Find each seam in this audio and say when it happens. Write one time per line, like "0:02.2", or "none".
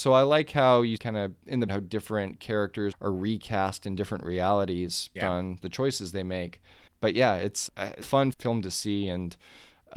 0:01.0
0:01.7
0:02.9
0:05.2
0:05.6
0:06.9
0:07.7
0:08.0
0:08.3